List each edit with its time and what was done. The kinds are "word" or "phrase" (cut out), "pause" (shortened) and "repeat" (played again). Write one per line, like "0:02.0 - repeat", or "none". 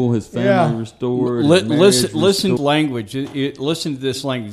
0:02.6 - phrase